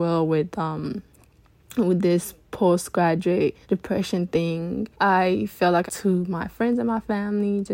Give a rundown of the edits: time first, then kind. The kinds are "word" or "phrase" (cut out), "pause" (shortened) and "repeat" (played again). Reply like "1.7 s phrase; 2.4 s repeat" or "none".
3.6 s pause; 4.9 s pause; 5.9 s phrase